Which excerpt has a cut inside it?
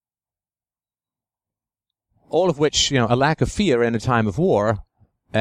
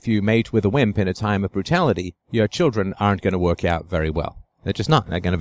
second; 1 cut; at 2.2 s

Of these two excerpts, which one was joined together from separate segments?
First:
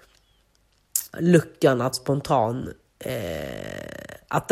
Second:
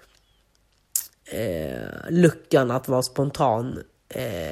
first; 2 cuts; at 1.1 s, 1.9 s

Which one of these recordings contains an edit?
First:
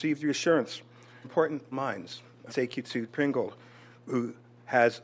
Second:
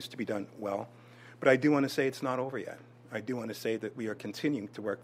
first; 4 cuts; at 1.2 s, 1.7 s, 2.5 s, 3.1 s

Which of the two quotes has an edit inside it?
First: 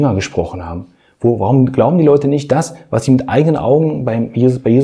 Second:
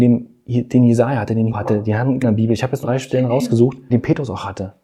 second; 4 cuts; at 1.5 s, 2.2 s, 2.8 s, 3.9 s

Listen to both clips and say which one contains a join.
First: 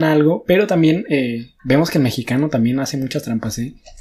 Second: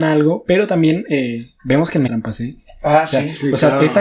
second; 1 cut; at 2.1 s

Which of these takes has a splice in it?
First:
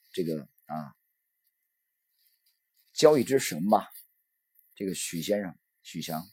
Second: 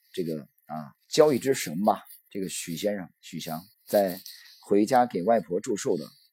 second; 4 cuts; at 1.0 s, 2.2 s, 3.2 s, 3.7 s

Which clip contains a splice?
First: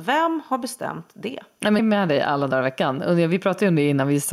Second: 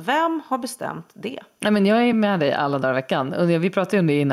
first; 1 cut; at 1.8 s

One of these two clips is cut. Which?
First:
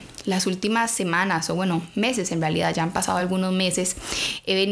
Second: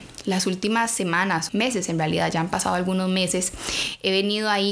second; 1 cut; at 1.5 s

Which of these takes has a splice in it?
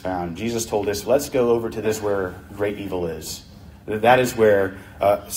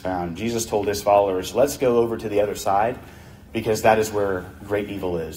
first; 2 cuts; at 1.0 s, 1.8 s

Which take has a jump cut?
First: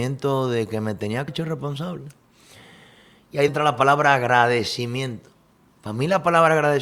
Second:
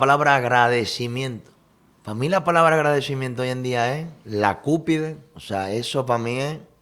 first; 2 cuts; at 1.3 s, 3.5 s

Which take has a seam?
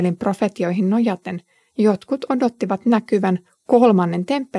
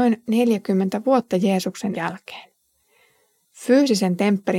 second; 1 cut; at 1.9 s

